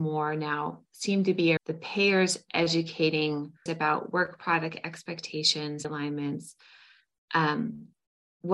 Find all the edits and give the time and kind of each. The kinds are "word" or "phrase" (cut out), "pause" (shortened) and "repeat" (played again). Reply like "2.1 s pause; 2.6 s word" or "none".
1.6 s word; 3.7 s word; 5.8 s word